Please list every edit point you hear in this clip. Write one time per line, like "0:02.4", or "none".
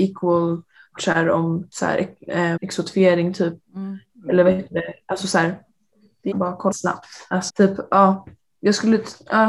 0:01.0
0:01.7
0:02.6
0:06.3
0:06.7
0:07.5